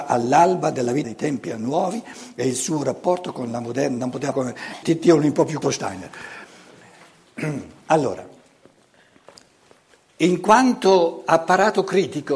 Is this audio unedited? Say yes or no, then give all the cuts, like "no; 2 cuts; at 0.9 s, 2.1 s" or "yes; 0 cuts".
no; 4 cuts; at 1.0 s, 4.3 s, 4.8 s, 5.6 s